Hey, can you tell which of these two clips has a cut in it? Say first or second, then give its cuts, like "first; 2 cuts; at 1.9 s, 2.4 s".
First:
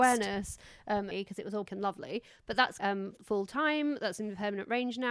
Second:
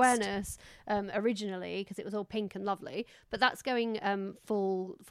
first; 4 cuts; at 1.1 s, 1.7 s, 2.8 s, 3.2 s